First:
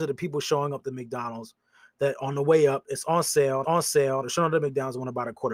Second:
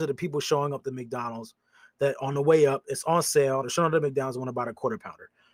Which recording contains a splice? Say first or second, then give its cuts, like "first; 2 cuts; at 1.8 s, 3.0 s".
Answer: first; 1 cut; at 3.6 s